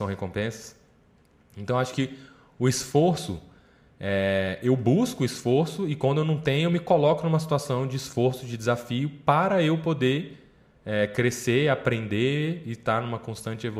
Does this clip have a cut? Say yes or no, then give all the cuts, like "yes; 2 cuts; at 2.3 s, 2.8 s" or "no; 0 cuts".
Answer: no; 0 cuts